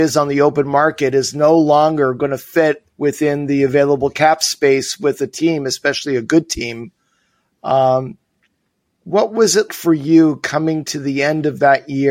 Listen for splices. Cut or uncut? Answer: cut